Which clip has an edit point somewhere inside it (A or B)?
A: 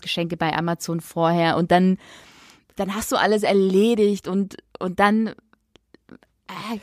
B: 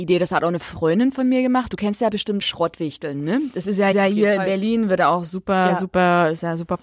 B